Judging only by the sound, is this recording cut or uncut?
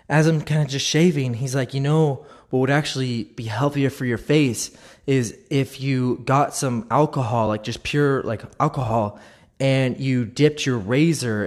uncut